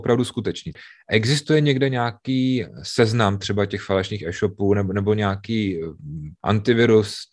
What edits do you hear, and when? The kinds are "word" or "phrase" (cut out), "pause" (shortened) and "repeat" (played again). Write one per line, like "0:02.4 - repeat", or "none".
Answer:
none